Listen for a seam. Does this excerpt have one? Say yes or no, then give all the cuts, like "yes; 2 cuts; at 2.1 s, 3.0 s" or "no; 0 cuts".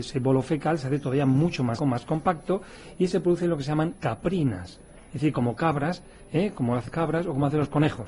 yes; 3 cuts; at 1.8 s, 3.9 s, 6.9 s